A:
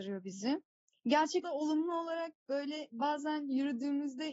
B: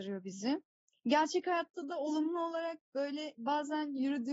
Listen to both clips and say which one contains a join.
A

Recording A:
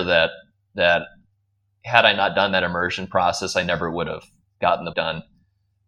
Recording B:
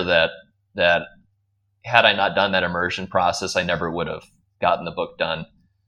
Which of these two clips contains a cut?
A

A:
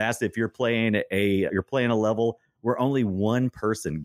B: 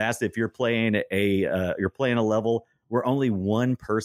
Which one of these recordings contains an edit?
A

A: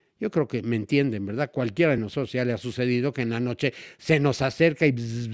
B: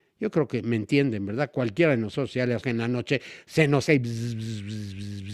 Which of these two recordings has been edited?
B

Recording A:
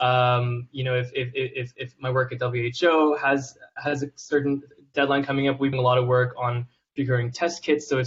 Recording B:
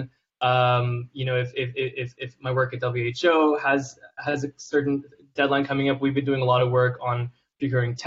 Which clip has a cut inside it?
A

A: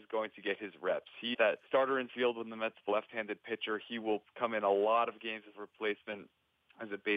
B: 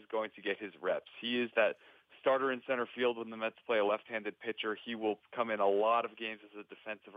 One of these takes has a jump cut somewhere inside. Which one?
A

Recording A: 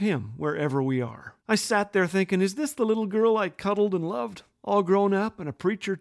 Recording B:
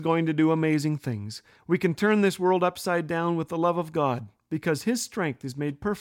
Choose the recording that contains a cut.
A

